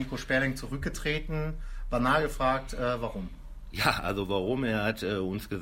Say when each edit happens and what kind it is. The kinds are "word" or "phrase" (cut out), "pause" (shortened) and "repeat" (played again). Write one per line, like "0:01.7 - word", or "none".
none